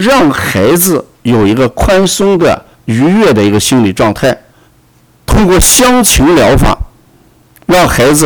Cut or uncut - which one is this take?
cut